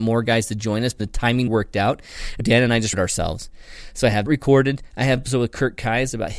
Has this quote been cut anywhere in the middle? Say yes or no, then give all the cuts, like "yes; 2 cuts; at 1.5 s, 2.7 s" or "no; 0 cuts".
yes; 6 cuts; at 1.0 s, 1.5 s, 2.4 s, 2.9 s, 4.3 s, 5.2 s